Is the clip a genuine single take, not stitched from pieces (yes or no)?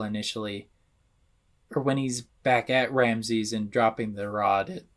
no